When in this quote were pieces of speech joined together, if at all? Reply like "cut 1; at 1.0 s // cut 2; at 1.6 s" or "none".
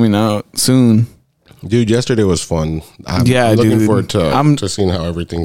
none